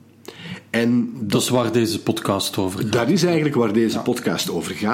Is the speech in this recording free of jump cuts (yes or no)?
yes